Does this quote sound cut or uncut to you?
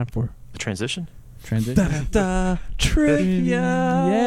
uncut